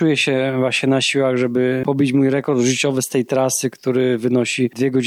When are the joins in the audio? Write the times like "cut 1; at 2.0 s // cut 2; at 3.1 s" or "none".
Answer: none

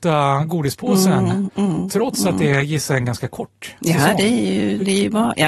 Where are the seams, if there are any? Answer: none

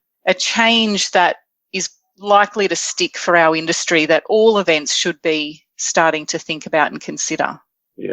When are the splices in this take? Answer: none

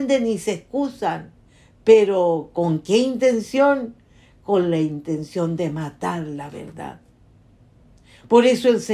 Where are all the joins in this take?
none

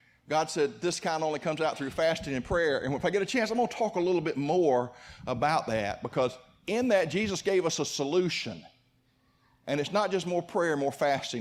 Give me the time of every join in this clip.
none

